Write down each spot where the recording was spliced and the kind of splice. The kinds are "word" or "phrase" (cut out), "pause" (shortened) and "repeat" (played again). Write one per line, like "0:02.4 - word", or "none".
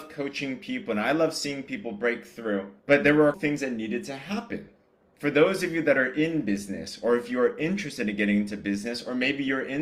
0:02.8 - pause
0:03.3 - word
0:05.0 - pause